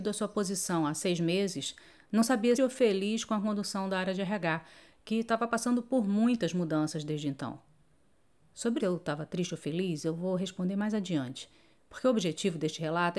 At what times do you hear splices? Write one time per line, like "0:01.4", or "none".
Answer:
0:02.6
0:08.8